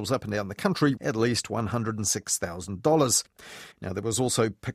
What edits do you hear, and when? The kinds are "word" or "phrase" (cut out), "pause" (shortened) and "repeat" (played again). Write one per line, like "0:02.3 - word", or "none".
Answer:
0:01.0 - word
0:03.7 - pause